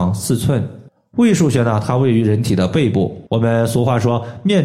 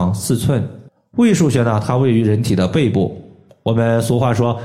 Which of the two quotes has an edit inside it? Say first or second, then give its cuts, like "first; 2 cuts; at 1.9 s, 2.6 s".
first; 1 cut; at 3.3 s